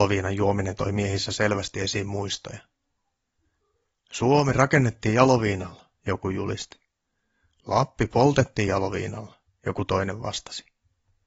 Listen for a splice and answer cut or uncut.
uncut